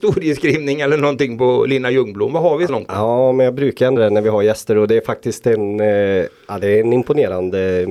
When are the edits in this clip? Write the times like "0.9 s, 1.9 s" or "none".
2.7 s, 4.0 s